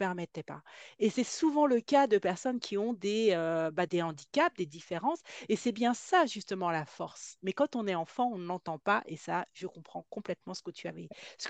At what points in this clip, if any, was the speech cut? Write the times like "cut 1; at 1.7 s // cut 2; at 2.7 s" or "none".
cut 1; at 3.9 s

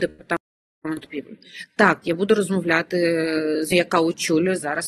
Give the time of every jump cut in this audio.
cut 1; at 3.7 s

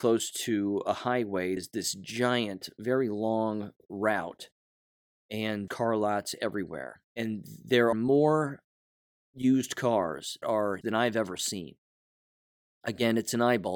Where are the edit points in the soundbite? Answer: cut 1; at 1.6 s // cut 2; at 5.7 s // cut 3; at 7.1 s // cut 4; at 7.9 s // cut 5; at 10.4 s // cut 6; at 10.8 s

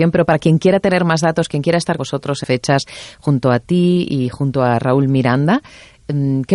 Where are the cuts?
cut 1; at 2.0 s // cut 2; at 2.4 s

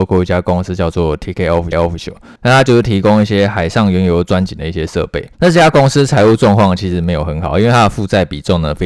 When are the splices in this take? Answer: cut 1; at 1.7 s // cut 2; at 2.4 s // cut 3; at 5.3 s

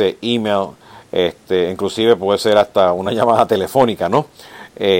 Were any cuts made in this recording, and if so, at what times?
none

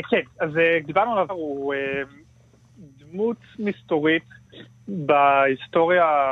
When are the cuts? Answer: cut 1; at 1.3 s

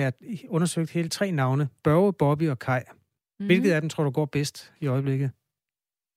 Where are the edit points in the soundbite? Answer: none

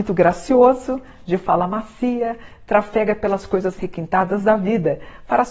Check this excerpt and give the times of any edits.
cut 1; at 3.8 s

